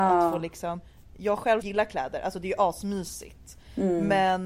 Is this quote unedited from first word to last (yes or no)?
no